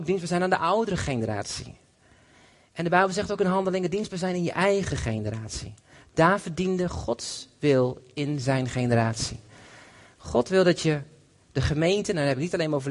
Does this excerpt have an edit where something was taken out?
no; 0 cuts

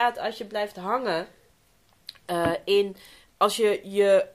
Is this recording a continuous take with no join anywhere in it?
yes; 0 cuts

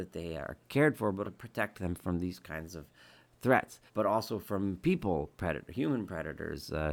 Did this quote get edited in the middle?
yes; 2 cuts; at 1.2 s, 3.9 s

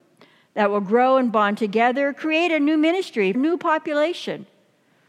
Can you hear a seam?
yes; 1 cut; at 3.3 s

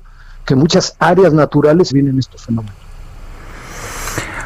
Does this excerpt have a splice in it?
yes; 1 cut; at 1.9 s

